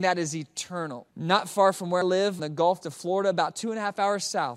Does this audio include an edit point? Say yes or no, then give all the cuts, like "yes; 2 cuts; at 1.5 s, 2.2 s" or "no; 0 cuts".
yes; 4 cuts; at 1.1 s, 2.0 s, 2.4 s, 2.8 s